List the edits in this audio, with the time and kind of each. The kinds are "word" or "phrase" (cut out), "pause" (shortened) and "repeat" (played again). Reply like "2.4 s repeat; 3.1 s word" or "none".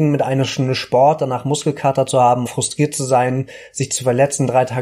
2.5 s word